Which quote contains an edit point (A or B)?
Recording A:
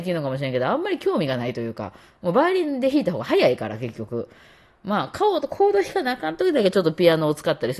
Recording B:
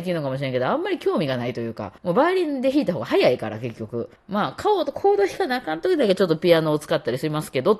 B